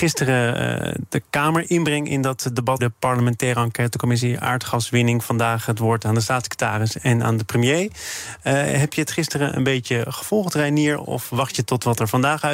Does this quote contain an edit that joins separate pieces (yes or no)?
yes